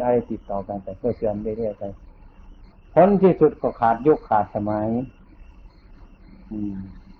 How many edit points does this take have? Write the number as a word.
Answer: zero